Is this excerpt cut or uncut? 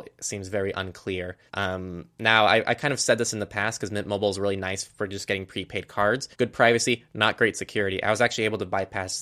cut